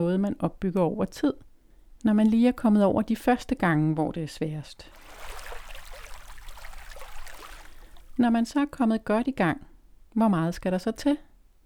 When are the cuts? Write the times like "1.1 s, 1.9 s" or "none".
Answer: none